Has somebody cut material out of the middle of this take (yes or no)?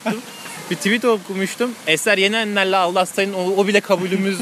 no